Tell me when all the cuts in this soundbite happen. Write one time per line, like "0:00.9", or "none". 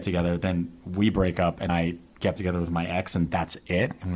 0:01.7
0:02.4